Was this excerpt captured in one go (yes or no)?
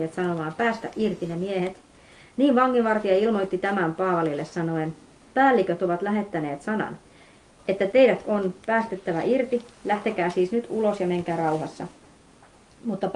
yes